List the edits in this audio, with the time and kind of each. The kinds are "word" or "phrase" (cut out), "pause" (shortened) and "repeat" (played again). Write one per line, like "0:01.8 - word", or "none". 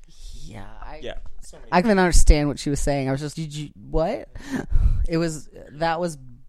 0:01.8 - word
0:03.3 - word